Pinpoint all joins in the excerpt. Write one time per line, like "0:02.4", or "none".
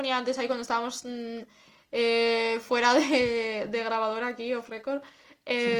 none

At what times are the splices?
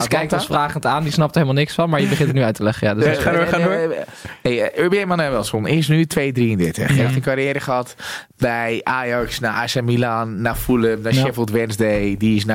none

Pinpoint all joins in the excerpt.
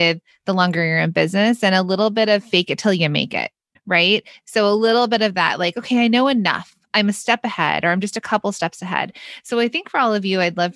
0:03.8

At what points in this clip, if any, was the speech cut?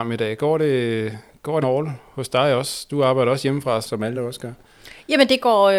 0:01.6
0:03.8
0:04.1

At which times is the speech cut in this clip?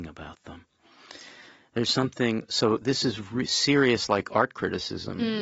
none

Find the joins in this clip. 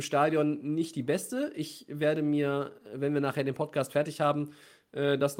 none

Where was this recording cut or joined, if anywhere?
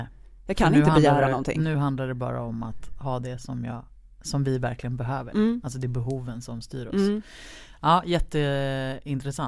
none

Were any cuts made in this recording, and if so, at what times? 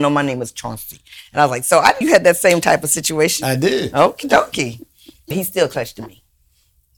0:02.0
0:05.3

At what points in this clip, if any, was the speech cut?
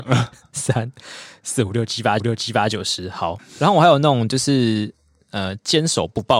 0:02.2

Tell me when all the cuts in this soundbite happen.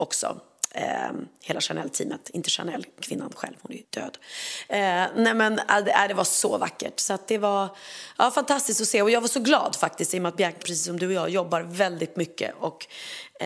0:03.8
0:10.6

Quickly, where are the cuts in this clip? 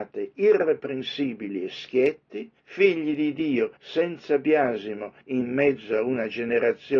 0:02.6
0:03.8
0:05.2

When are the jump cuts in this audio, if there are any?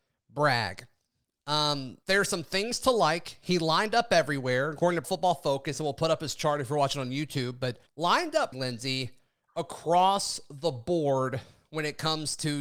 0:02.0
0:05.0
0:07.9
0:08.5

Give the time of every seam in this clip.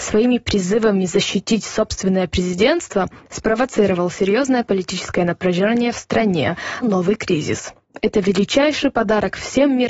0:06.8

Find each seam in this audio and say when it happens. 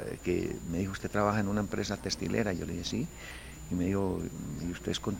none

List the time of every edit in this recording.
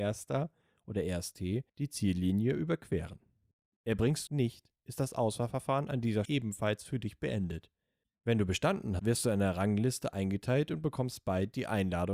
0:01.7
0:04.3
0:06.3
0:09.0

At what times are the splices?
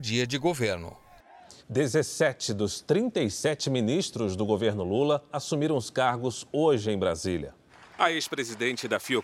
0:01.6
0:07.7

